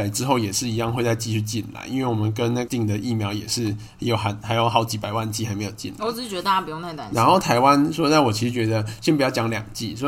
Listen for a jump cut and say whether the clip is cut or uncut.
cut